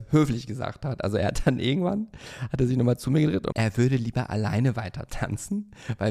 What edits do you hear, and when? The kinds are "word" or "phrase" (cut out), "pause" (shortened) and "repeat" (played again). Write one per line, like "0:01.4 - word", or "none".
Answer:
0:03.5 - word